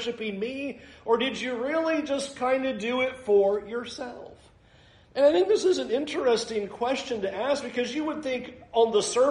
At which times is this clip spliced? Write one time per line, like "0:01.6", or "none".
none